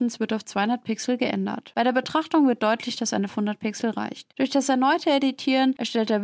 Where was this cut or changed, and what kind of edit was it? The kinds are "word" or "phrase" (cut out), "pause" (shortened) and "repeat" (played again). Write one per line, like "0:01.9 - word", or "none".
0:03.3 - phrase